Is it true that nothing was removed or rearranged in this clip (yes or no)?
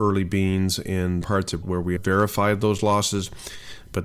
no